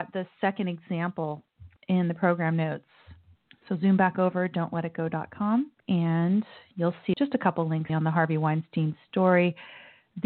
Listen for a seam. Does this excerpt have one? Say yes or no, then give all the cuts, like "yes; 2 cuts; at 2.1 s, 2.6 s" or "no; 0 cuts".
yes; 5 cuts; at 1.8 s, 3.4 s, 5.8 s, 7.1 s, 7.9 s